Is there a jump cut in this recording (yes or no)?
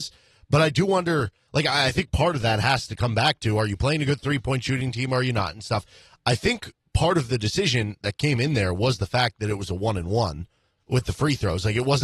no